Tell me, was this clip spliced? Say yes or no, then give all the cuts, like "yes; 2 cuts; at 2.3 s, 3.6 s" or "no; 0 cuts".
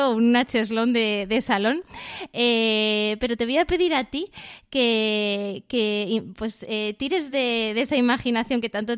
no; 0 cuts